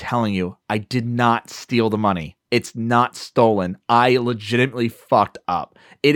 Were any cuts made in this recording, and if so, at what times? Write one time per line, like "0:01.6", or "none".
none